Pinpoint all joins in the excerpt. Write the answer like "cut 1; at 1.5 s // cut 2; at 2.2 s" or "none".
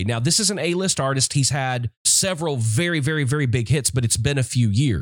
cut 1; at 1.9 s